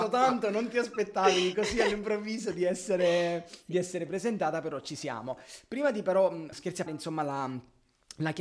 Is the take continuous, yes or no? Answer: no